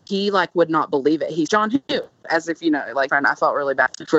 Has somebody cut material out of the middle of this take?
yes; 2 cuts; at 1.5 s, 3.1 s

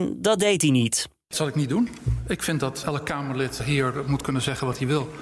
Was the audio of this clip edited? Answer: yes; 3 cuts; at 1.3 s, 2.8 s, 3.6 s

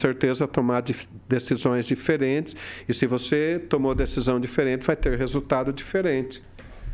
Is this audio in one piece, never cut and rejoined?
yes; 0 cuts

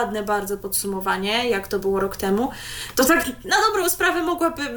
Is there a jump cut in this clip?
no; 0 cuts

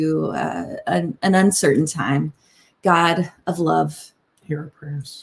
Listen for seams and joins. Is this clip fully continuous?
yes; 0 cuts

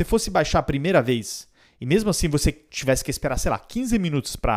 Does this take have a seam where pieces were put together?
no; 0 cuts

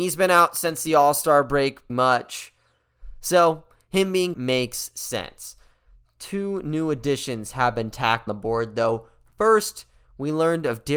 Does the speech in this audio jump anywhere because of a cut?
yes; 3 cuts; at 1.9 s, 4.3 s, 8.3 s

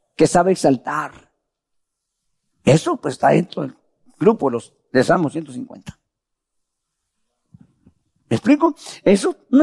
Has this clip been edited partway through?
no; 0 cuts

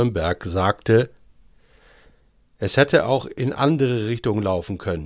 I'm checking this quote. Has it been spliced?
no; 0 cuts

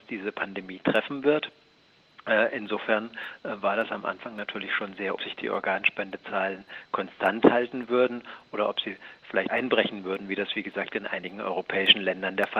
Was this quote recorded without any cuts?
no; 2 cuts; at 5.2 s, 9.5 s

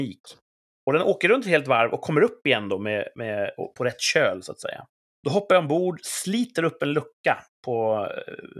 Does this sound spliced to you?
yes; 1 cut; at 5.0 s

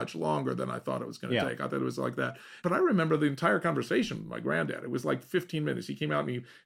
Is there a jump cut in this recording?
no; 0 cuts

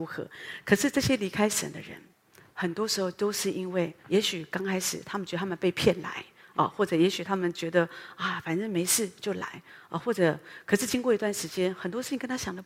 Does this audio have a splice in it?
yes; 1 cut; at 4.0 s

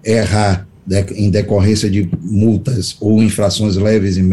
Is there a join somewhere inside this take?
no; 0 cuts

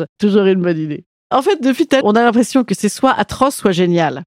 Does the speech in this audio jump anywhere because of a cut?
yes; 1 cut; at 2.0 s

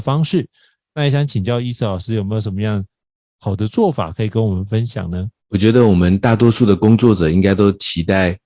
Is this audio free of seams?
no; 1 cut; at 5.4 s

